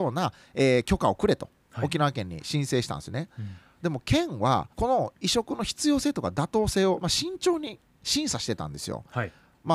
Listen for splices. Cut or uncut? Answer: cut